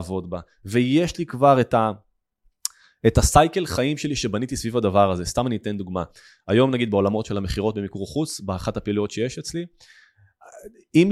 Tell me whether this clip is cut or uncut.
uncut